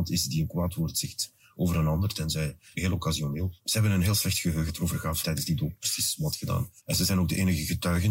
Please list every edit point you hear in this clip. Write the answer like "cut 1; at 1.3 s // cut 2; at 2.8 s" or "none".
cut 1; at 2.7 s // cut 2; at 3.6 s // cut 3; at 4.7 s // cut 4; at 5.2 s // cut 5; at 6.8 s